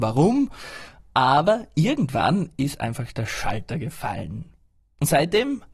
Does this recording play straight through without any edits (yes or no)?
yes